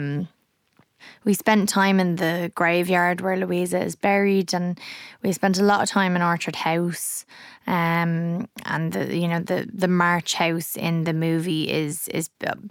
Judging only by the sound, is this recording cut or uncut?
uncut